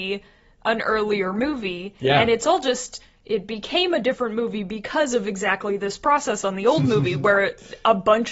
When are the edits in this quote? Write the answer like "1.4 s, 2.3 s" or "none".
none